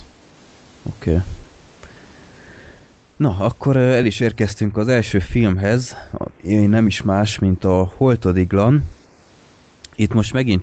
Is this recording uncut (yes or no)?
yes